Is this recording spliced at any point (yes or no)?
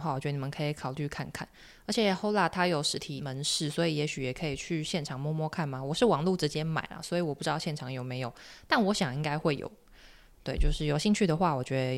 no